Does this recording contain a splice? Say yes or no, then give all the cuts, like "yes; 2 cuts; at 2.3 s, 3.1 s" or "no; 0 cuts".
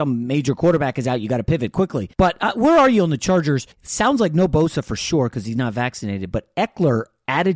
yes; 2 cuts; at 2.1 s, 3.7 s